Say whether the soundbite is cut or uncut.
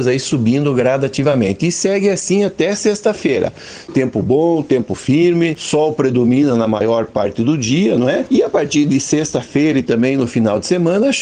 uncut